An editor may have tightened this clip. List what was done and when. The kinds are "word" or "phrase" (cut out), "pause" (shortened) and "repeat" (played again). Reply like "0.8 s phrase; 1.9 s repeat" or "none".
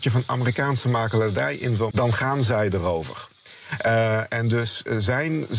1.9 s word